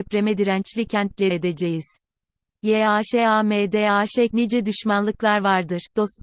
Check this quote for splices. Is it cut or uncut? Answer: cut